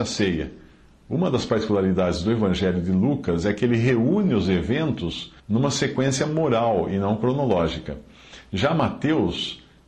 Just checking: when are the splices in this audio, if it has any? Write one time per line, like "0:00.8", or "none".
0:05.4